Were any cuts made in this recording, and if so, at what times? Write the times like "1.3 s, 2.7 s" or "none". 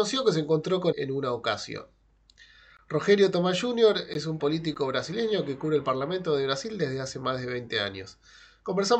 0.9 s, 4.4 s